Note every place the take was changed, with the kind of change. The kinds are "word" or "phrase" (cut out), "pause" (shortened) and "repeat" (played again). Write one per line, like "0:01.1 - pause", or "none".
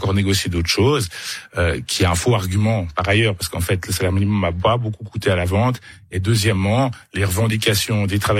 none